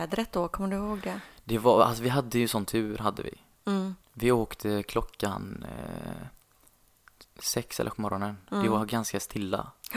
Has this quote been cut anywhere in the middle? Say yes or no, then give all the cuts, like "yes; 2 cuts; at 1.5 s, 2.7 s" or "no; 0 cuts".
yes; 2 cuts; at 4.0 s, 7.9 s